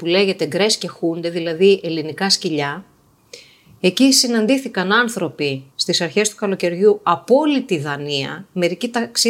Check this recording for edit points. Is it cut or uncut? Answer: cut